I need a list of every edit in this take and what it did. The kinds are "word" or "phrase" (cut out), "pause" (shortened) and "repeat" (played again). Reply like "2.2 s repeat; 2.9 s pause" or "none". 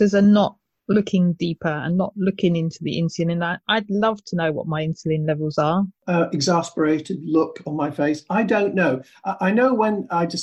6.0 s pause